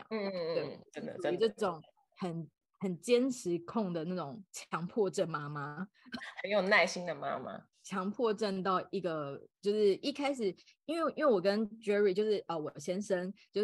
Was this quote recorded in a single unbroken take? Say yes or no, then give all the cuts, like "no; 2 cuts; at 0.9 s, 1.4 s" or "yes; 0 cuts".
yes; 0 cuts